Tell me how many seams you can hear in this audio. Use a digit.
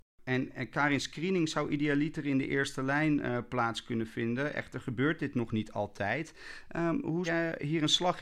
1